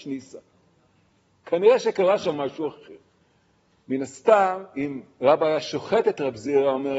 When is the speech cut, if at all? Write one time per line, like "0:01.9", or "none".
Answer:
0:03.2